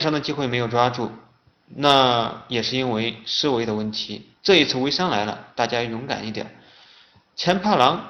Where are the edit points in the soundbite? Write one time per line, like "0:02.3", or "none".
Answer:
0:04.4

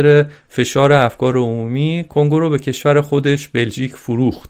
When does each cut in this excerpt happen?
none

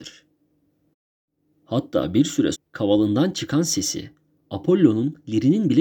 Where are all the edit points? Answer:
0:02.5

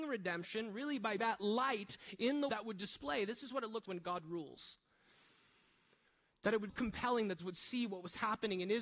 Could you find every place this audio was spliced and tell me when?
0:01.2
0:02.5
0:03.8
0:06.7
0:07.4

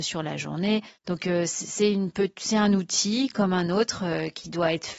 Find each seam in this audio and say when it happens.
0:01.0

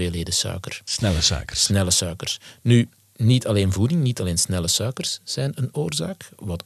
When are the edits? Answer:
none

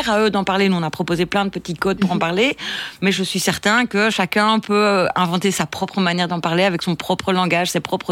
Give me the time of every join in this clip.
none

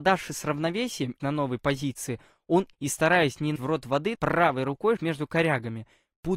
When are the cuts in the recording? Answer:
0:01.2
0:02.7
0:03.6
0:04.1
0:05.0

